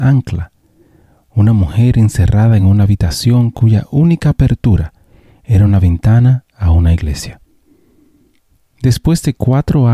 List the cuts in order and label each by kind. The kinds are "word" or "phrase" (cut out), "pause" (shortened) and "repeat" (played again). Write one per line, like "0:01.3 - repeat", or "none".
none